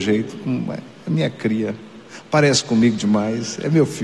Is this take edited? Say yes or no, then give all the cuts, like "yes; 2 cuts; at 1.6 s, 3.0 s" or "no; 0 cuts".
no; 0 cuts